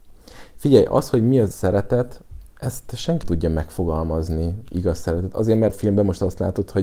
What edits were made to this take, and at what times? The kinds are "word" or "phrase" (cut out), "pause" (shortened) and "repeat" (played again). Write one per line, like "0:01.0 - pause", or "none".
0:01.5 - word
0:03.2 - word
0:05.7 - word